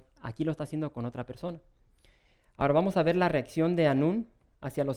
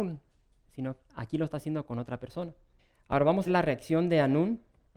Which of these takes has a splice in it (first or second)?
second